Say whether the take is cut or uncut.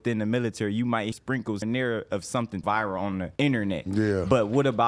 cut